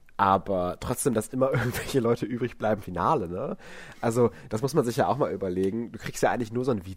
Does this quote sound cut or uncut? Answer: cut